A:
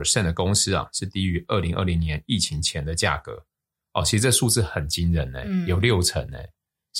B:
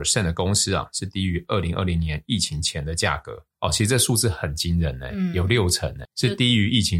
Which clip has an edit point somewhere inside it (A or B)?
B